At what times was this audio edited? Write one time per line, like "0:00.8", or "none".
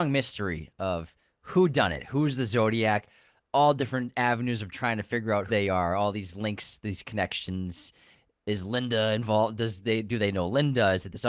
0:05.5